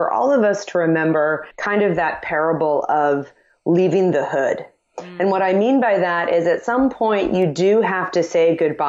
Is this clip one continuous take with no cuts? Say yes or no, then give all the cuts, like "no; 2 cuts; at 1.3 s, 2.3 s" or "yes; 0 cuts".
no; 1 cut; at 1.5 s